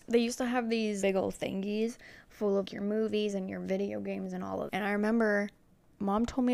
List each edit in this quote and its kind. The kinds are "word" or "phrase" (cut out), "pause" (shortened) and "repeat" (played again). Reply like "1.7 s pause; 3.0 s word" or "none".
1.0 s word; 2.6 s word; 4.7 s word